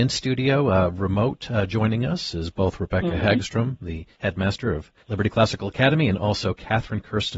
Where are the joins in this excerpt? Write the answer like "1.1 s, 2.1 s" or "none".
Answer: 4.1 s, 5.0 s

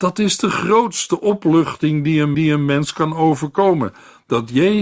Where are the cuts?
2.3 s

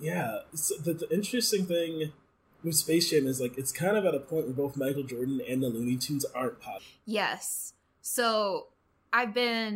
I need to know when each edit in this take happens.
none

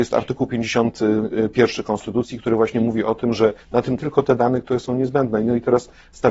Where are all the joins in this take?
3.6 s, 4.0 s

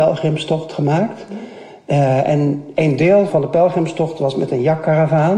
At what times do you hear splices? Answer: 3.3 s

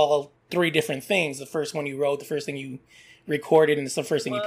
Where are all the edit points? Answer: none

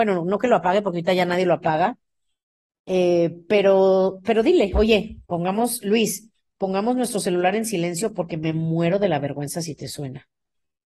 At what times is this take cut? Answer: 5.2 s

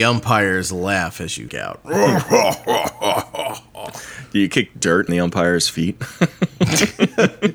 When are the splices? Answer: 1.5 s, 5.1 s

